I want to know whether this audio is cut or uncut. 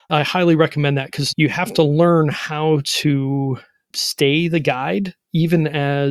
uncut